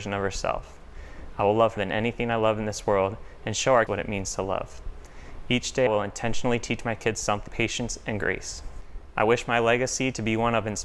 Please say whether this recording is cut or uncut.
cut